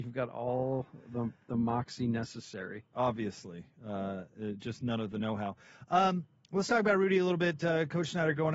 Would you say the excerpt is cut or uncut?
uncut